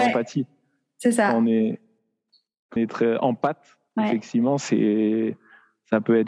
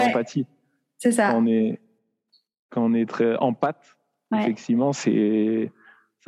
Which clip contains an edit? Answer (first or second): first